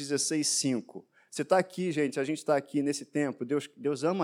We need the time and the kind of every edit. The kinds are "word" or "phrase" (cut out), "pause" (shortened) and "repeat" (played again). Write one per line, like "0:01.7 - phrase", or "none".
none